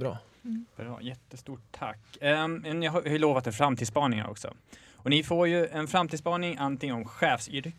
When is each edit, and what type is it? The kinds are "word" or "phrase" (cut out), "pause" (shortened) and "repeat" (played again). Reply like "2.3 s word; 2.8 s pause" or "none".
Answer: none